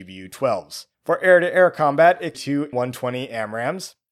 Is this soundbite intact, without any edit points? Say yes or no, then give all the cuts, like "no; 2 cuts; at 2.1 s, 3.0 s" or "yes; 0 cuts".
no; 3 cuts; at 0.9 s, 2.3 s, 2.7 s